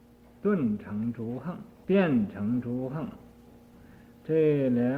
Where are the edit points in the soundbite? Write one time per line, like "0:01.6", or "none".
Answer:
0:01.7